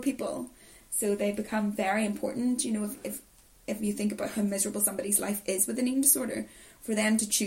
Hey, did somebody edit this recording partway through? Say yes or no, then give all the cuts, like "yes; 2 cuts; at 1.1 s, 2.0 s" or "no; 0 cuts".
no; 0 cuts